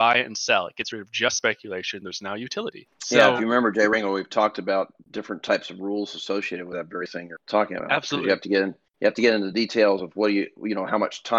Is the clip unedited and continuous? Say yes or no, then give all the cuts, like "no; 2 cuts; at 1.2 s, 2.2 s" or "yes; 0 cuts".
yes; 0 cuts